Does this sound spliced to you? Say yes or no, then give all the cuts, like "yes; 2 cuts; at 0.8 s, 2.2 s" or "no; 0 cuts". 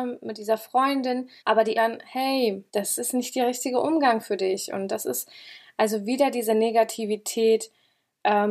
yes; 3 cuts; at 1.4 s, 1.7 s, 2.7 s